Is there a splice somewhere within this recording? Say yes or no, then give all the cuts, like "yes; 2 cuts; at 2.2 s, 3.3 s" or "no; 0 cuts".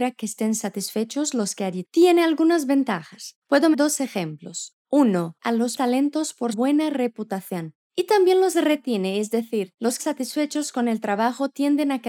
yes; 6 cuts; at 1.8 s, 3.7 s, 5.4 s, 5.8 s, 6.5 s, 10.0 s